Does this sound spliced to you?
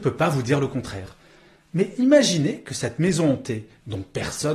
no; 0 cuts

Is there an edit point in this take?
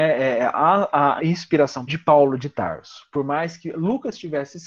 yes; 2 cuts; at 1.2 s, 1.9 s

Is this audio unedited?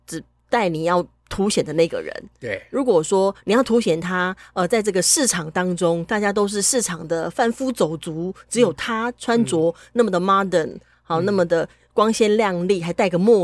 yes; 0 cuts

